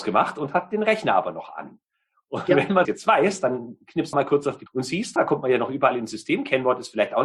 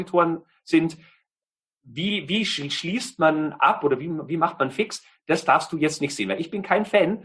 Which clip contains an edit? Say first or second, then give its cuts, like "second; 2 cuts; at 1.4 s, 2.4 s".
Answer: first; 4 cuts; at 2.8 s, 4.1 s, 4.7 s, 5.2 s